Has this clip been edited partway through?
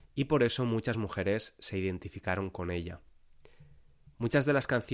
no; 0 cuts

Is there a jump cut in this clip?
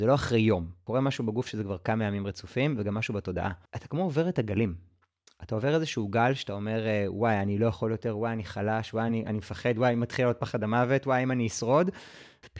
no; 0 cuts

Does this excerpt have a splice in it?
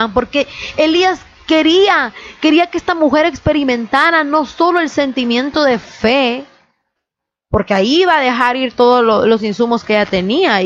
no; 0 cuts

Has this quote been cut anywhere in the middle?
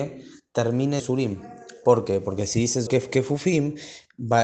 yes; 2 cuts; at 1.0 s, 2.9 s

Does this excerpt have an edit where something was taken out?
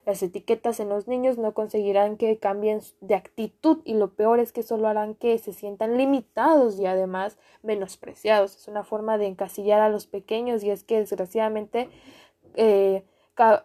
no; 0 cuts

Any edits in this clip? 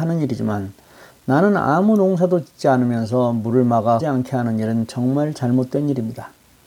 yes; 1 cut; at 4.0 s

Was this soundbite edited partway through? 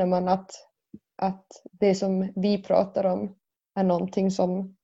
no; 0 cuts

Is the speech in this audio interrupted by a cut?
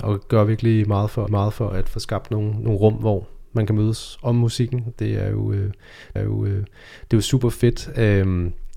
yes; 2 cuts; at 1.3 s, 6.2 s

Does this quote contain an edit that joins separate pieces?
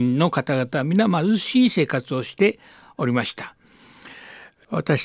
no; 0 cuts

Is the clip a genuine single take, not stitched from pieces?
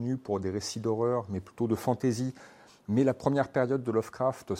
yes; 0 cuts

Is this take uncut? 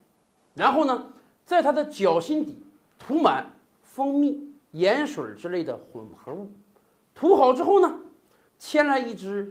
yes; 0 cuts

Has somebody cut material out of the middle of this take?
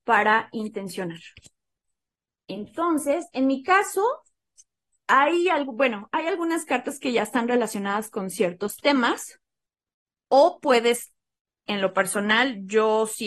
no; 0 cuts

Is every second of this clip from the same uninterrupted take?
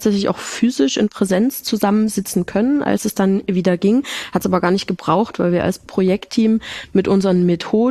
yes; 0 cuts

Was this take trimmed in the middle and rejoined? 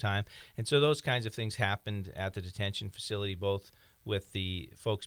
no; 0 cuts

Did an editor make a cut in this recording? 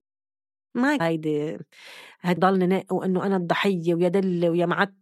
yes; 2 cuts; at 1.0 s, 2.4 s

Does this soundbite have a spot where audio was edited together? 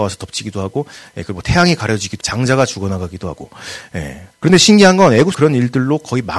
yes; 3 cuts; at 2.2 s, 4.3 s, 5.3 s

